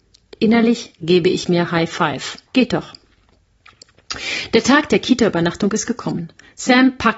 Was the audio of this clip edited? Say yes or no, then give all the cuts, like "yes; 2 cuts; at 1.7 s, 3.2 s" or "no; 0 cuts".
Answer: yes; 1 cut; at 2.5 s